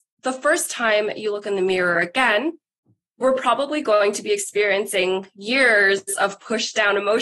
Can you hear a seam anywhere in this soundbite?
no; 0 cuts

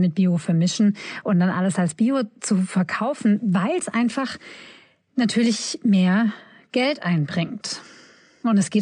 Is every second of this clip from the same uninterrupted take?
yes; 0 cuts

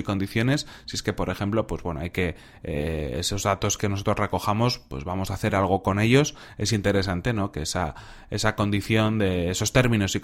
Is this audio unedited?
yes; 0 cuts

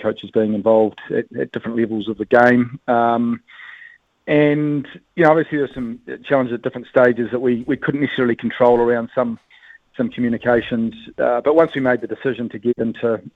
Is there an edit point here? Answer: no; 0 cuts

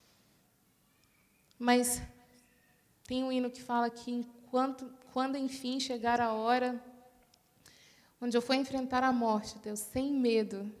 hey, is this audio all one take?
yes; 0 cuts

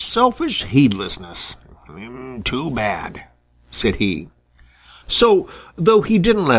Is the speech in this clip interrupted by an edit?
no; 0 cuts

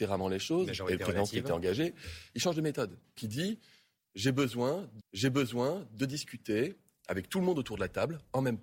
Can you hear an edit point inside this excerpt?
yes; 2 cuts; at 3.2 s, 5.0 s

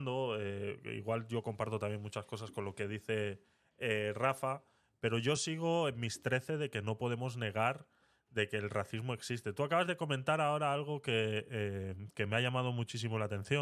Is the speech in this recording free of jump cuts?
yes; 0 cuts

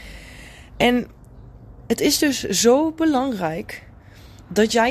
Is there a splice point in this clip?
no; 0 cuts

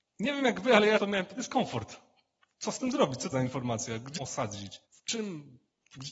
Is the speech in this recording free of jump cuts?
no; 5 cuts; at 1.0 s, 1.4 s, 3.3 s, 4.2 s, 4.9 s

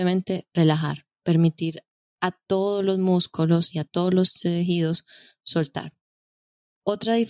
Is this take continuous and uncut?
yes; 0 cuts

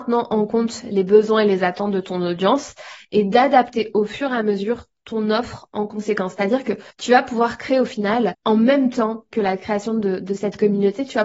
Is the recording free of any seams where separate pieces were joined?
no; 1 cut; at 6.9 s

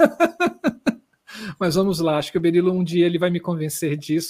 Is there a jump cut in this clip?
no; 0 cuts

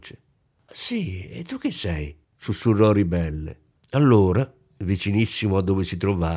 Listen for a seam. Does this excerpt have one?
yes; 2 cuts; at 2.2 s, 3.8 s

